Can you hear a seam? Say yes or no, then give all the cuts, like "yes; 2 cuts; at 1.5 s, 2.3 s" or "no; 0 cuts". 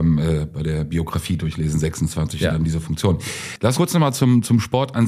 yes; 1 cut; at 3.7 s